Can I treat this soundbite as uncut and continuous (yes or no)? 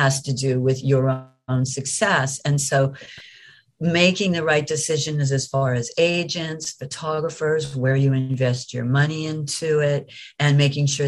yes